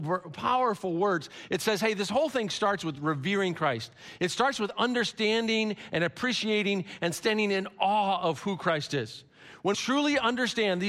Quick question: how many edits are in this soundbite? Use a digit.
1